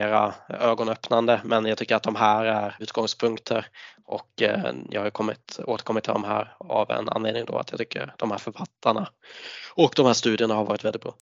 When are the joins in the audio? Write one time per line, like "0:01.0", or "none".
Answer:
0:02.8

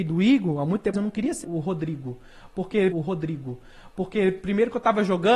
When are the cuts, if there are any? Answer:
0:00.9
0:01.4
0:02.9

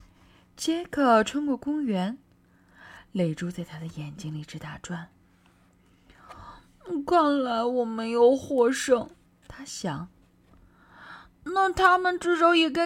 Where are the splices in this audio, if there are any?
0:09.3

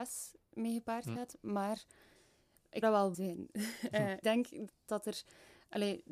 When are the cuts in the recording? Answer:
0:02.8
0:03.1
0:04.2
0:04.7

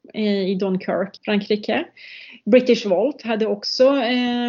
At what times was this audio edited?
0:01.2

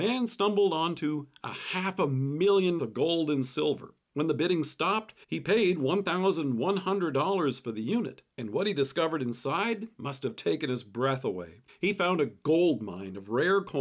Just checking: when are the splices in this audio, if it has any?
0:02.8
0:04.0
0:05.2
0:08.3
0:11.7

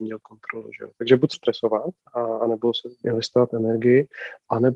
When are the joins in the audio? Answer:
0:01.3

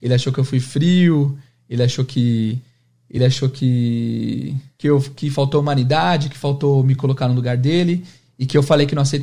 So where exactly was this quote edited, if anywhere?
none

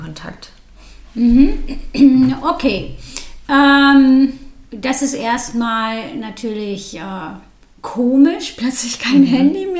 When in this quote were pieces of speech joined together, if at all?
0:04.7
0:07.6

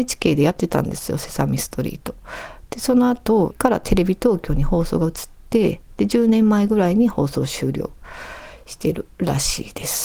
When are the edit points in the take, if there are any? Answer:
0:03.5

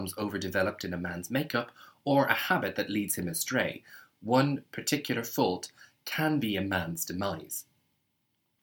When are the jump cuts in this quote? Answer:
none

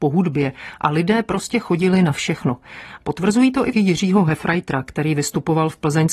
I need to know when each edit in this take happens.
0:03.7

